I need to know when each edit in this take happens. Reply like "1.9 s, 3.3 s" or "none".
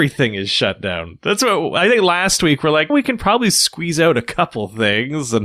2.9 s